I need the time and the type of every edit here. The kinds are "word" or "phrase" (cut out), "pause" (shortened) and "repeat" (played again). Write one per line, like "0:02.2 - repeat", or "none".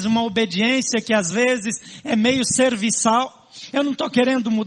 none